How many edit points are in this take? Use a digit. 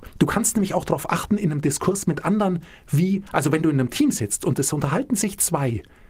0